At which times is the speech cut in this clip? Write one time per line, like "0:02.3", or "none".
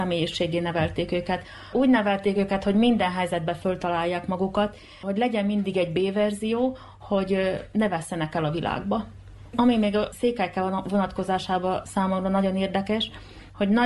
none